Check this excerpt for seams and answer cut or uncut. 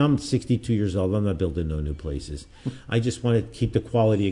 uncut